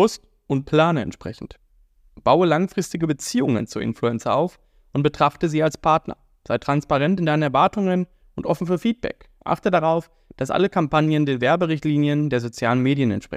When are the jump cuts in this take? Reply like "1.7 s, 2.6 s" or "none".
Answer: none

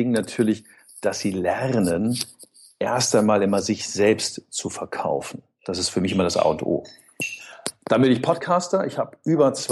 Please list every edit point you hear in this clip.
none

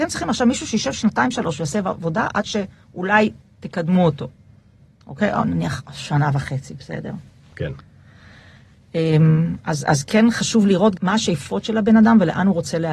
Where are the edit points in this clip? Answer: 11.0 s

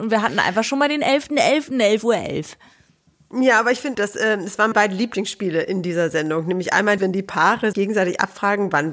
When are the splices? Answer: 3.9 s, 4.7 s, 7.0 s, 7.7 s

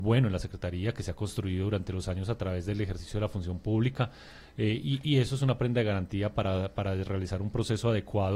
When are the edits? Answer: none

